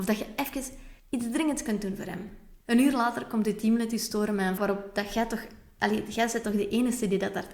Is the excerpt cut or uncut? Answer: cut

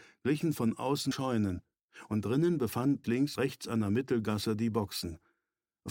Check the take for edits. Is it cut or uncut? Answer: cut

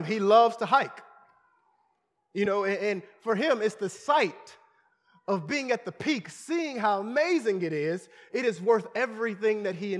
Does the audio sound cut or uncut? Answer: uncut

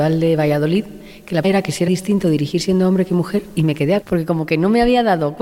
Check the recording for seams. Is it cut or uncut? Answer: cut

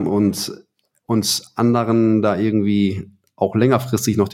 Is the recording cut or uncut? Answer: uncut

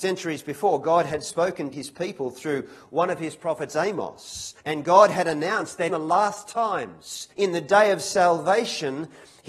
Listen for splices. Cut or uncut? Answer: cut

